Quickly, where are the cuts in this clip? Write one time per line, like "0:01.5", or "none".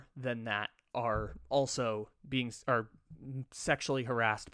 none